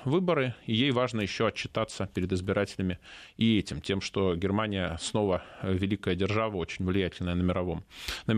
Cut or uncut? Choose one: uncut